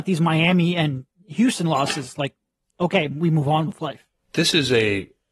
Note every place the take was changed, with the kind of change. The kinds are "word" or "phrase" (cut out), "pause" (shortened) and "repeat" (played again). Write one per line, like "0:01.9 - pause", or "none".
none